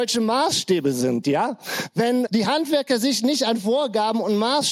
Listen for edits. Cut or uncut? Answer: cut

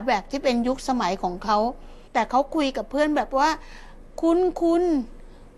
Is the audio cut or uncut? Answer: cut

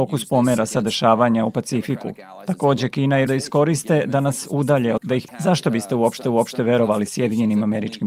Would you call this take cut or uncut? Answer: cut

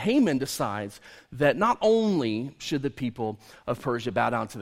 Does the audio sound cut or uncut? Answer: uncut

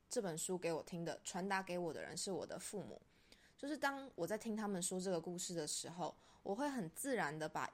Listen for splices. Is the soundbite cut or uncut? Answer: uncut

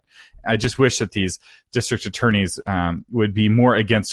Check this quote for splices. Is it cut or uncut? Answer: uncut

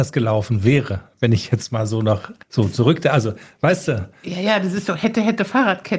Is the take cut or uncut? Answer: cut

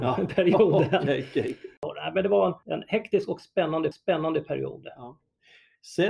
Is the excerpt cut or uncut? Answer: cut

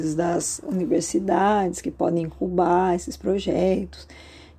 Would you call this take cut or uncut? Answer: uncut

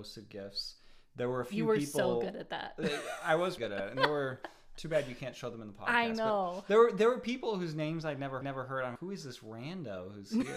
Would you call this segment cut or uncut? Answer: cut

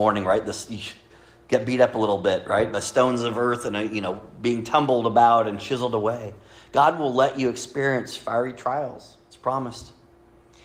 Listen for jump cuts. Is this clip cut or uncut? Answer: uncut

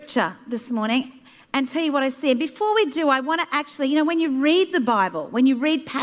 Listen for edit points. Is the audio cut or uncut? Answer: uncut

